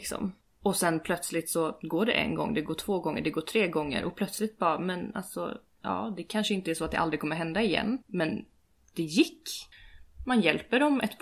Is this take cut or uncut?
cut